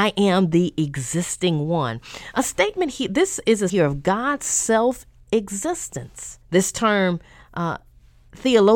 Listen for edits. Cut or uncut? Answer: cut